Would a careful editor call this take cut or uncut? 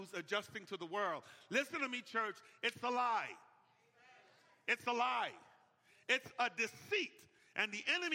uncut